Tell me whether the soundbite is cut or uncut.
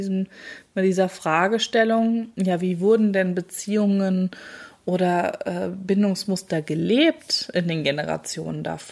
uncut